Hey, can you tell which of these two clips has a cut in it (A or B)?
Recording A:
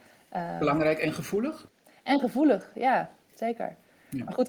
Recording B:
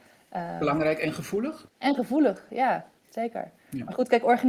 B